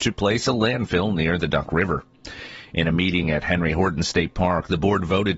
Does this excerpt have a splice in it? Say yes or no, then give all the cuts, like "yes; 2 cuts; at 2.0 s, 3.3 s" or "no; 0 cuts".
no; 0 cuts